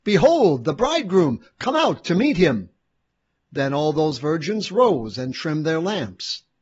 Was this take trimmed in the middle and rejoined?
no; 0 cuts

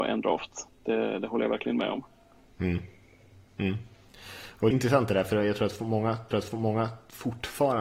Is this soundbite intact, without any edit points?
no; 3 cuts; at 2.4 s, 4.7 s, 6.3 s

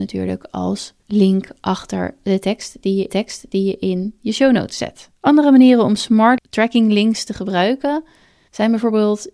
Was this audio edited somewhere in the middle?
yes; 4 cuts; at 1.0 s, 3.1 s, 5.2 s, 6.4 s

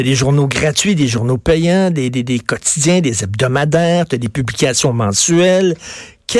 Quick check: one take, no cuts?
yes; 0 cuts

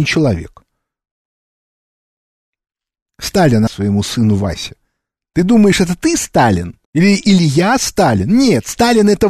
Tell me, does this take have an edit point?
yes; 2 cuts; at 3.7 s, 6.8 s

